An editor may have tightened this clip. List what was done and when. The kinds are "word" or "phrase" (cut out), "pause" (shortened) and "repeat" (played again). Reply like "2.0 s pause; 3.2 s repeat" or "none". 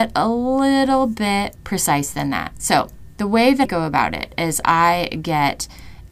1.6 s word; 3.6 s word

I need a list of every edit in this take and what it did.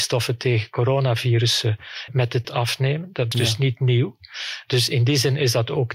2.1 s word; 2.4 s word; 3.3 s word

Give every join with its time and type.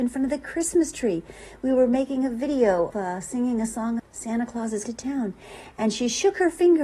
2.9 s word; 4.0 s word; 4.9 s word

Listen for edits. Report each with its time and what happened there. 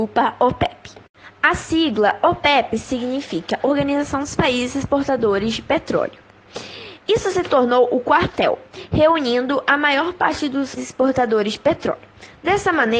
10.8 s word

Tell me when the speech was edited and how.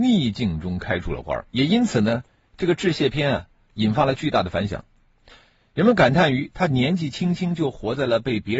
1.5 s pause

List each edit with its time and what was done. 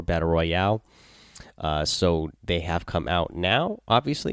none

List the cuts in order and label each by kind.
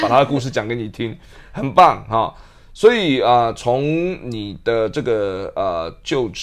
none

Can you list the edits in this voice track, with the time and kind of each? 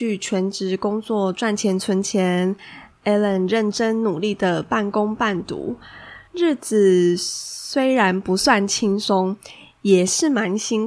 6.3 s pause

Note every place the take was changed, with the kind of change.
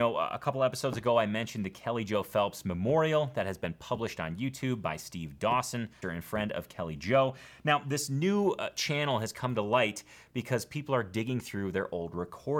6.0 s word

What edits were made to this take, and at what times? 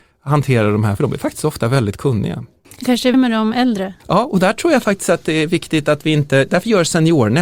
1.0 s word; 3.1 s word

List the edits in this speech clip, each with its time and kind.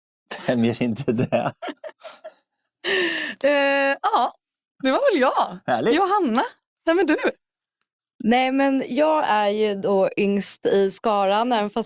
none

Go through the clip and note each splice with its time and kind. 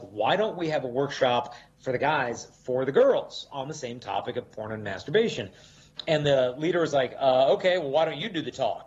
none

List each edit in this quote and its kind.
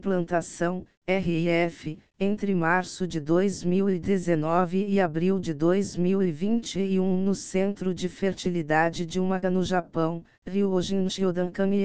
9.4 s word

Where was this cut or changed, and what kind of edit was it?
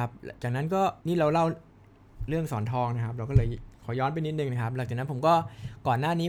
1.0 s pause

